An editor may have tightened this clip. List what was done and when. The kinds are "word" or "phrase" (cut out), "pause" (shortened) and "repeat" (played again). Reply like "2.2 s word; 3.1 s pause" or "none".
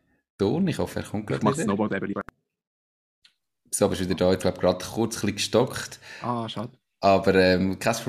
4.4 s word